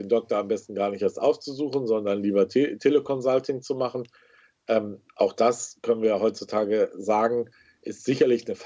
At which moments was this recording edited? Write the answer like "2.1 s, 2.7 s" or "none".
5.1 s